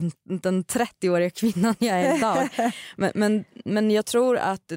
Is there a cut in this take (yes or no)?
no